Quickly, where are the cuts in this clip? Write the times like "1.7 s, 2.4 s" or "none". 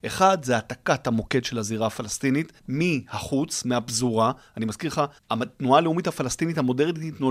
2.6 s, 5.2 s